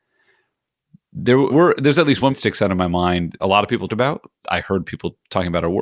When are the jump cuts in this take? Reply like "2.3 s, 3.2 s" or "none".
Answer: 1.5 s, 2.3 s, 3.4 s, 3.9 s, 4.4 s